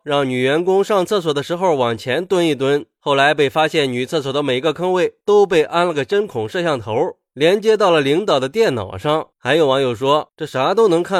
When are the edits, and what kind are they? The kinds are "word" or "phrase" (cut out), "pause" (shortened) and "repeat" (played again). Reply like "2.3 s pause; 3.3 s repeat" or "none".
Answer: 9.3 s pause